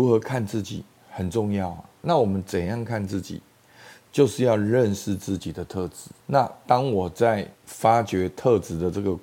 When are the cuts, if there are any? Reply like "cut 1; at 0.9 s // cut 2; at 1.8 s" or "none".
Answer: cut 1; at 6.2 s // cut 2; at 7.6 s